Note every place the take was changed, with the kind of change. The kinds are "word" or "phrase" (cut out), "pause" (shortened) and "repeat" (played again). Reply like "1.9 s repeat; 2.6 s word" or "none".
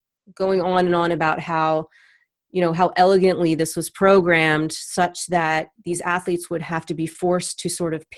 none